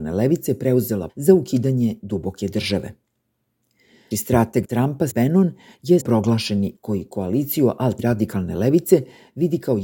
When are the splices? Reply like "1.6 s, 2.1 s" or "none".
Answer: 1.1 s, 4.1 s, 4.6 s, 5.1 s, 6.0 s, 6.8 s, 8.0 s